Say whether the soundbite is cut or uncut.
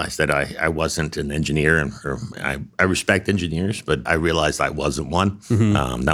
cut